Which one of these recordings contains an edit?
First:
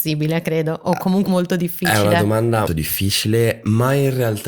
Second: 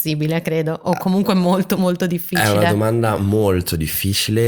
first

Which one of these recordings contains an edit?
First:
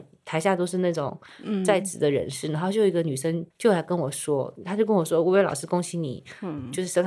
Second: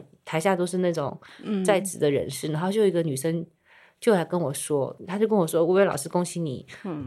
first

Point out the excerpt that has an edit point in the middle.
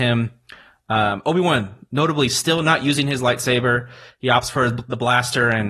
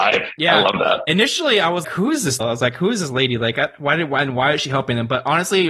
second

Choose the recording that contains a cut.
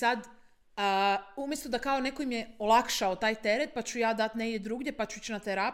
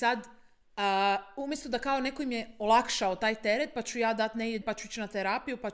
second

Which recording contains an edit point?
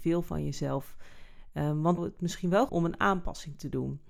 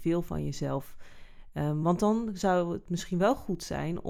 first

